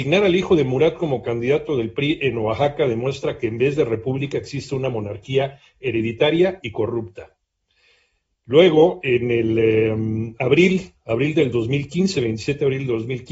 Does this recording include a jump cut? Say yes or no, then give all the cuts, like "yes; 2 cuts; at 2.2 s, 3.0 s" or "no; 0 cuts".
no; 0 cuts